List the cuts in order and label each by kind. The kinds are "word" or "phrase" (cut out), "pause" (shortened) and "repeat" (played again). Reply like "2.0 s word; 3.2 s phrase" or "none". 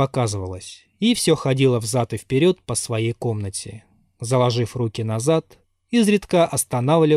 none

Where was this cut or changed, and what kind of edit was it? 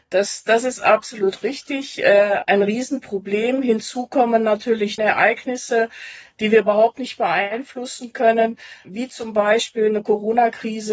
2.4 s word; 5.0 s word; 8.8 s word

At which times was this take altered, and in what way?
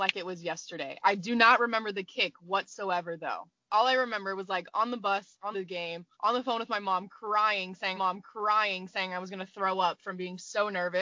5.5 s phrase; 6.1 s pause; 7.9 s repeat

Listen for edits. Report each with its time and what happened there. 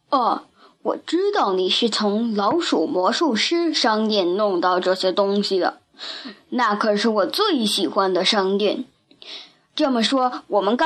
none

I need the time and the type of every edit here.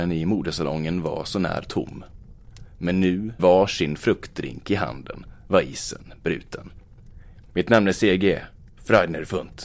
3.4 s word

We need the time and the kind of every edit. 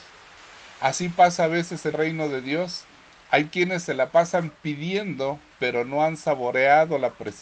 1.9 s word; 5.5 s pause

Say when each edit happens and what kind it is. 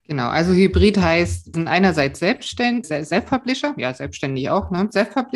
1.5 s word; 2.8 s word

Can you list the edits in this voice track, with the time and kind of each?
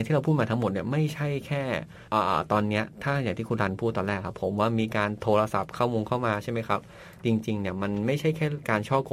2.1 s pause; 7.2 s pause

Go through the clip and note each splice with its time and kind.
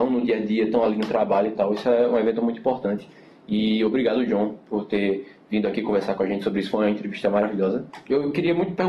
none

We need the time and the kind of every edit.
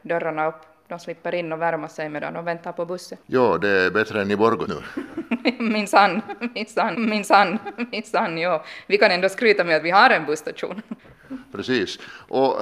3.2 s pause; 4.7 s word; 6.9 s repeat; 11.0 s pause

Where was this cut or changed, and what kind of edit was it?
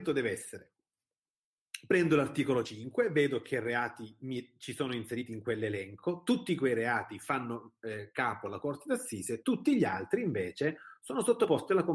none

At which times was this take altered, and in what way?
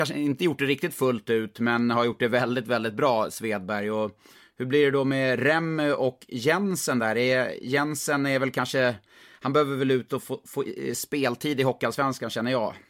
none

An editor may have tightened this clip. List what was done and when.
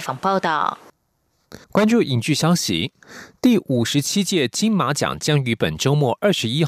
1.6 s pause

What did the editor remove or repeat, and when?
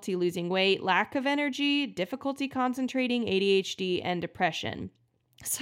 none

